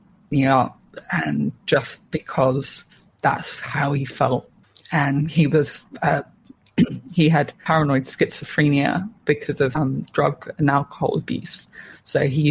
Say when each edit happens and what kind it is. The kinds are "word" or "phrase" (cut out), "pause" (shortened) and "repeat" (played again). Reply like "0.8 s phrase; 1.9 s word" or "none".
4.6 s pause

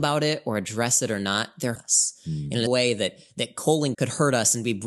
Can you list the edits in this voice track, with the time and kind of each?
1.8 s word; 2.7 s word; 3.9 s word

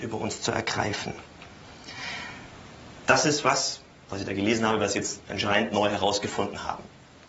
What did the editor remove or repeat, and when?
none

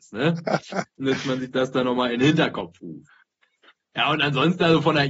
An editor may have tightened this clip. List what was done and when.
none

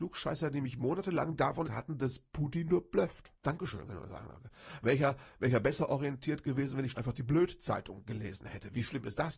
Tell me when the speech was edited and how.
1.6 s word; 3.4 s pause; 6.9 s word

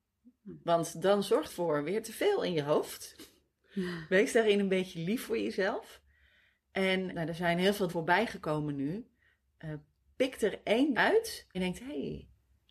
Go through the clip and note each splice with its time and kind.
1.5 s word; 7.1 s word; 7.9 s word; 10.9 s word; 11.5 s word

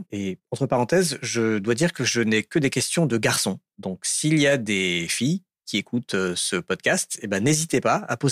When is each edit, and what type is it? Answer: none

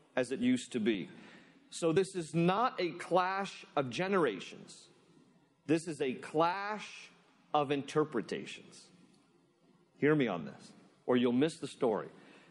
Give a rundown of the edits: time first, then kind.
none

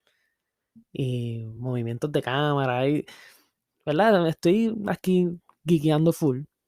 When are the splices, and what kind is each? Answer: none

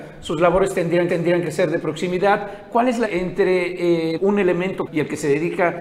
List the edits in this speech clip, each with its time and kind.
1.1 s repeat; 3.0 s word; 4.2 s word; 4.9 s phrase

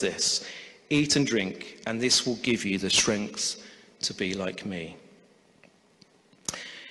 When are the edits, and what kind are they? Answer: none

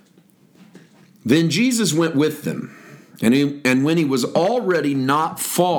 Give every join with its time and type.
none

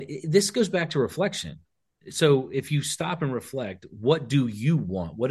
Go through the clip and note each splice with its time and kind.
none

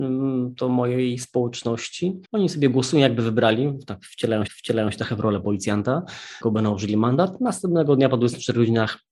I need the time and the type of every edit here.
2.2 s pause; 4.5 s repeat; 6.4 s word

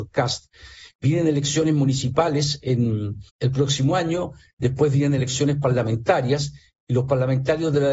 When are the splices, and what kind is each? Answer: 3.3 s pause

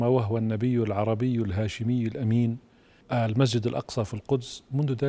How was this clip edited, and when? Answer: 3.0 s word

